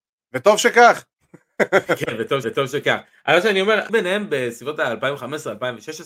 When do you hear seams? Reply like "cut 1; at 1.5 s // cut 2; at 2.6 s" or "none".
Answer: cut 1; at 2.4 s // cut 2; at 3.9 s